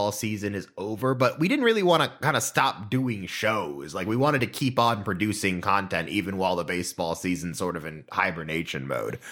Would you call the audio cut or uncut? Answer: uncut